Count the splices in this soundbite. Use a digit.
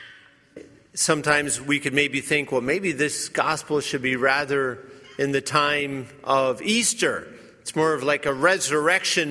0